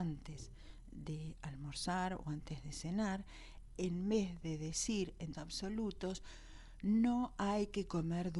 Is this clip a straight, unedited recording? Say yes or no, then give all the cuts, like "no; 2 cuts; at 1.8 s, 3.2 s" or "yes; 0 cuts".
no; 1 cut; at 5.3 s